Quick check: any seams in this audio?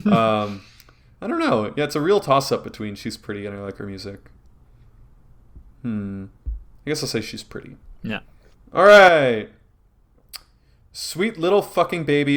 yes; 1 cut; at 8.5 s

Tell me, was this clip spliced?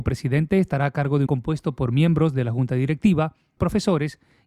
yes; 2 cuts; at 1.3 s, 3.6 s

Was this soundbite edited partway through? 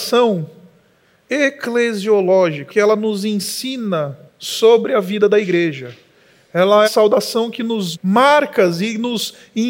yes; 4 cuts; at 2.7 s, 4.3 s, 6.8 s, 7.9 s

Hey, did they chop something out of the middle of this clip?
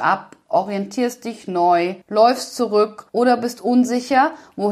yes; 2 cuts; at 2.0 s, 3.1 s

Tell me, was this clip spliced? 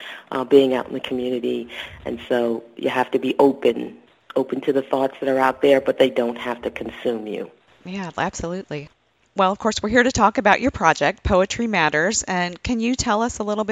no; 0 cuts

